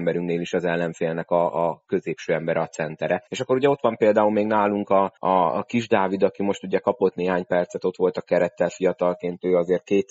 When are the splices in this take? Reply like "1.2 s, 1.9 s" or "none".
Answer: 3.3 s, 5.2 s

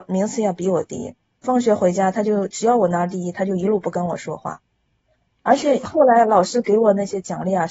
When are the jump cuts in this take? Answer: 1.4 s

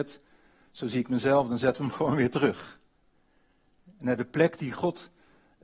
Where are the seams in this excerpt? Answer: none

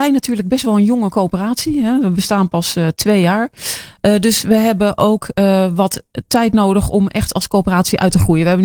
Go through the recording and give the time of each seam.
none

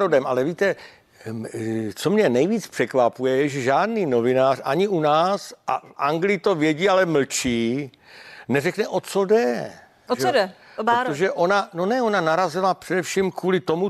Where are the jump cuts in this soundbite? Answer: none

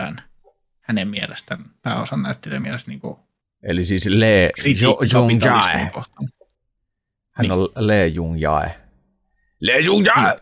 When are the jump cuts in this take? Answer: none

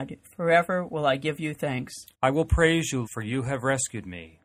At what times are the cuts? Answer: 2.1 s, 3.0 s

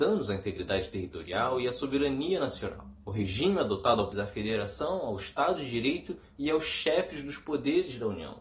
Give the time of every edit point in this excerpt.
4.1 s

